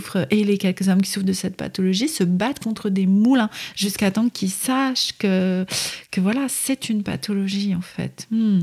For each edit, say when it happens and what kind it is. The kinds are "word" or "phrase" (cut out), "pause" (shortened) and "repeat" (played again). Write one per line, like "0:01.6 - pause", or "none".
none